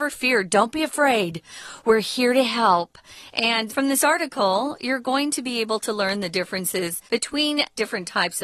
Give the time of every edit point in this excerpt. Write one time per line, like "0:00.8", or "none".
0:03.7
0:07.1